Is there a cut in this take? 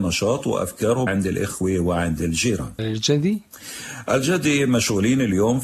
yes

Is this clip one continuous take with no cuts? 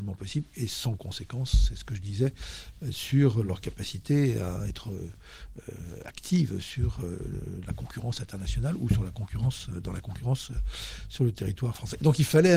yes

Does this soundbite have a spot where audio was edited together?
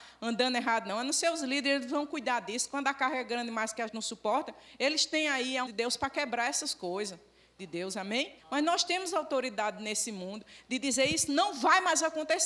yes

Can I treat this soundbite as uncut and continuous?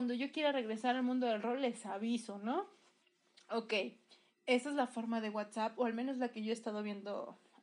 yes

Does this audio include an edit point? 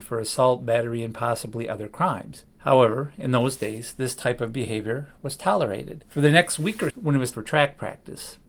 yes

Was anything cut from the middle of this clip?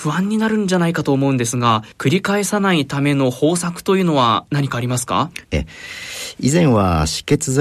yes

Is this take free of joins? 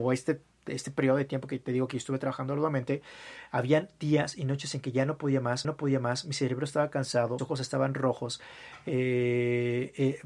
no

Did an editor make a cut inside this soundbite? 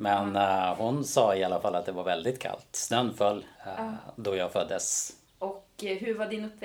yes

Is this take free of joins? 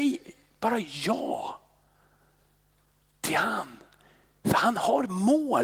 yes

